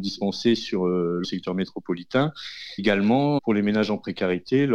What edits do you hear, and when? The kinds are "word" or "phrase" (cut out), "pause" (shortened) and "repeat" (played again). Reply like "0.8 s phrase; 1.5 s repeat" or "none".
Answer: 1.2 s word; 2.8 s word; 3.4 s word